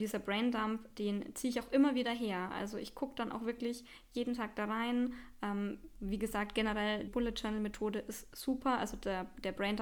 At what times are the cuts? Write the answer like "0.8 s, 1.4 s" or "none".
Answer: 7.1 s